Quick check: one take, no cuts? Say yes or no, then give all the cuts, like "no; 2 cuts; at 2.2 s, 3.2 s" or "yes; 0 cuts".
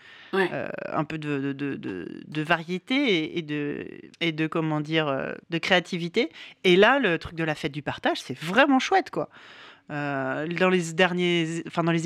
no; 2 cuts; at 4.1 s, 5.4 s